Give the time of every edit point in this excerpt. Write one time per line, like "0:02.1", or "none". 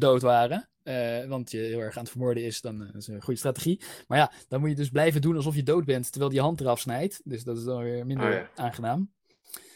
0:01.5